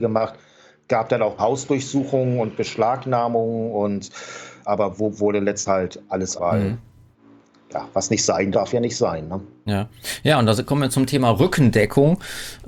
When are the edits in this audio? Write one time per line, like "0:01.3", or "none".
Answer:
0:01.4
0:04.6
0:05.7
0:06.4
0:08.5